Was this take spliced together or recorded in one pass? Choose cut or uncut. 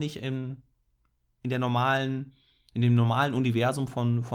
uncut